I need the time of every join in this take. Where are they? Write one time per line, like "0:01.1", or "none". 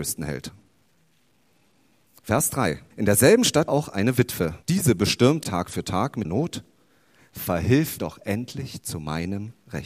0:02.9
0:03.7
0:04.6
0:05.4
0:06.2
0:08.0